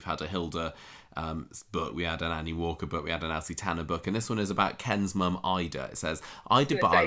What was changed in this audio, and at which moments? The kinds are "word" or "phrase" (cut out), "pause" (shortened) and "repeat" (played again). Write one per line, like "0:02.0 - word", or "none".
none